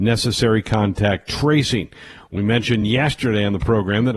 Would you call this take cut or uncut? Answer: uncut